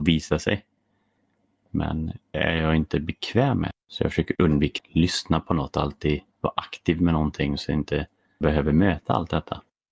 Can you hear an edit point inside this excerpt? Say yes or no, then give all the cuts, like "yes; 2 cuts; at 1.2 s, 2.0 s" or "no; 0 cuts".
yes; 4 cuts; at 2.3 s, 3.8 s, 4.8 s, 8.4 s